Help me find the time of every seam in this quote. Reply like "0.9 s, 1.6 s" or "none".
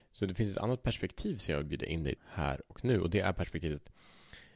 2.2 s

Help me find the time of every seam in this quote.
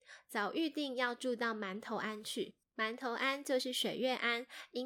2.6 s

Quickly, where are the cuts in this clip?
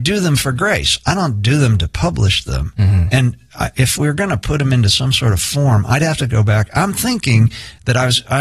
none

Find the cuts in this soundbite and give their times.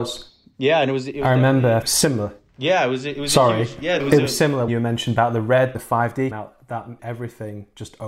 1.8 s, 4.0 s, 4.7 s, 5.7 s, 6.3 s, 7.0 s

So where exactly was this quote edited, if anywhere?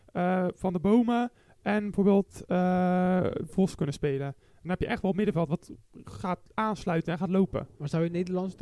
none

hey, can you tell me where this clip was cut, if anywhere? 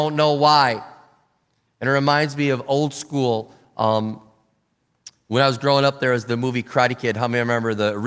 none

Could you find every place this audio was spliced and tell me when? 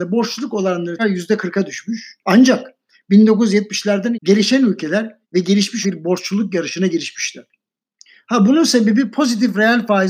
1.0 s, 2.2 s, 4.1 s, 5.2 s, 5.8 s

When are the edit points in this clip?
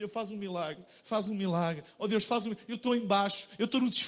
1.3 s

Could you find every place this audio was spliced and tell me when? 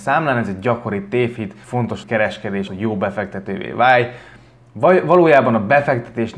1.6 s, 2.0 s, 2.7 s

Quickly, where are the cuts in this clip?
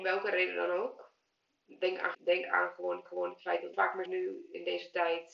2.1 s, 3.1 s, 3.7 s, 4.1 s

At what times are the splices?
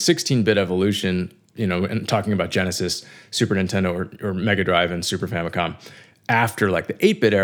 none

